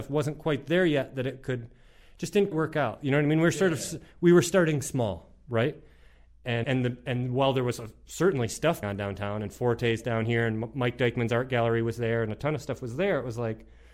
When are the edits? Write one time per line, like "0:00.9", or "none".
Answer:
0:02.5
0:06.6
0:08.8